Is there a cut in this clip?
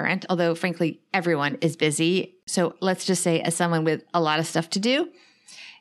no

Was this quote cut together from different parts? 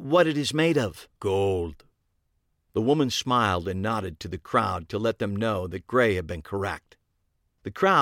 yes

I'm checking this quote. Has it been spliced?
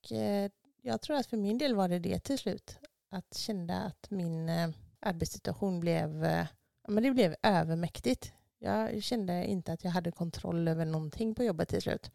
no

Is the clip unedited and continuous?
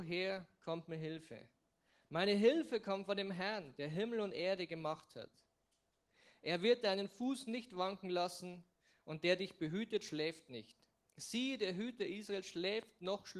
yes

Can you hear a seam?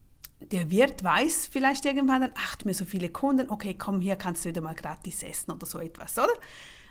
yes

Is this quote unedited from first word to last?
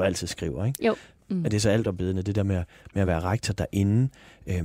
yes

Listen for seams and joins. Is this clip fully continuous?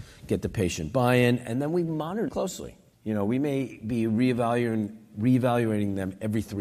no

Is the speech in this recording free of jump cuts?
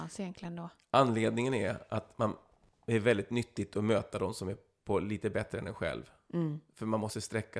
yes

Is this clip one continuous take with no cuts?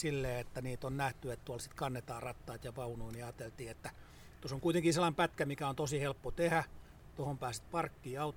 yes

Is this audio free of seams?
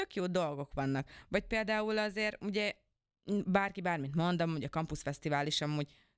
yes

